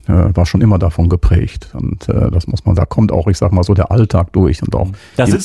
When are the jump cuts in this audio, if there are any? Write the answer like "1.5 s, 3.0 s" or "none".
2.8 s